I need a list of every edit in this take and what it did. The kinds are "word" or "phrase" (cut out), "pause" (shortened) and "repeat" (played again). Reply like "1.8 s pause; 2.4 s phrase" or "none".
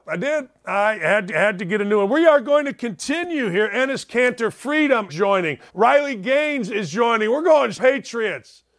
1.3 s repeat; 5.1 s word; 5.7 s pause; 7.7 s word